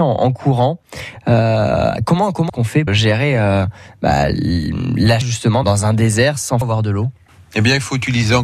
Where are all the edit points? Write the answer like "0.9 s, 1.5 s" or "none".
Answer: 2.5 s, 2.9 s, 5.2 s, 5.6 s, 6.6 s, 7.3 s